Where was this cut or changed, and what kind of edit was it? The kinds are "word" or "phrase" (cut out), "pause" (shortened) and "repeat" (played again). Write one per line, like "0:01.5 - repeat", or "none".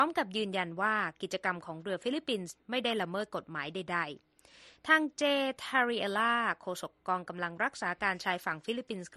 none